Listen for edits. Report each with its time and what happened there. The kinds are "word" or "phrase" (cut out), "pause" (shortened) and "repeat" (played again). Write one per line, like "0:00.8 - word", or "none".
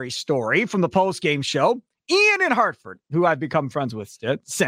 none